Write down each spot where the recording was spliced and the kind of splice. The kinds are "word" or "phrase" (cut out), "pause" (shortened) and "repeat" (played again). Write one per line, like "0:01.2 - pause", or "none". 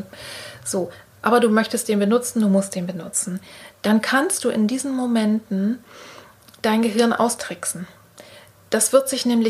none